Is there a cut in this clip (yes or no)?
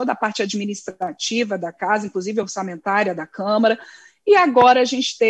no